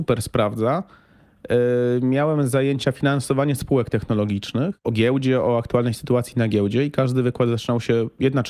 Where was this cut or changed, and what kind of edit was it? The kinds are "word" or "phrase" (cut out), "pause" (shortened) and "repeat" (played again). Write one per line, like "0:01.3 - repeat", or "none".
0:04.8 - phrase